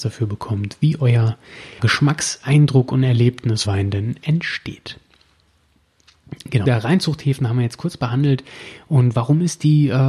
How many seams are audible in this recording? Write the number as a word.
three